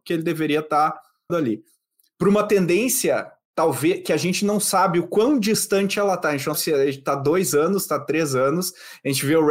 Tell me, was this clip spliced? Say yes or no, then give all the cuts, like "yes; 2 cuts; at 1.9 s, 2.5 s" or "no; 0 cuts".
yes; 2 cuts; at 1.3 s, 6.5 s